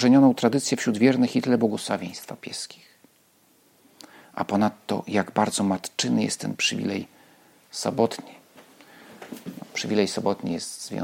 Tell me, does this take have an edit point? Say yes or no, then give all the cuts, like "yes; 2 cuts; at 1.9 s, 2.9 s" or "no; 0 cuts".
no; 0 cuts